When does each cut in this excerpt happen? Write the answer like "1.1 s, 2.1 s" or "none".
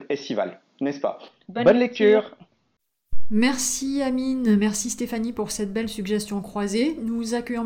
none